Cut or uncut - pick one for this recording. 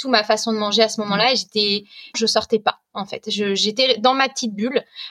cut